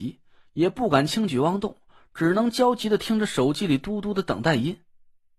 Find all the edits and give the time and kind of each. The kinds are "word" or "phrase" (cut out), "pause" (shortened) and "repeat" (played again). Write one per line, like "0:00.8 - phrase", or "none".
none